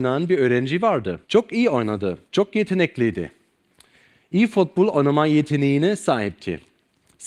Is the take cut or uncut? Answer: cut